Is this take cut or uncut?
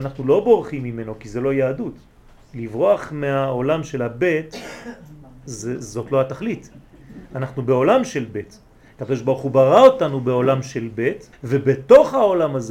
cut